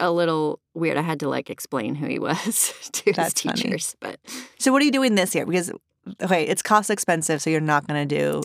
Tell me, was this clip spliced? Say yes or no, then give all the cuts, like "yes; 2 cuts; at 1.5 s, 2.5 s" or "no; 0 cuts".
yes; 1 cut; at 4.5 s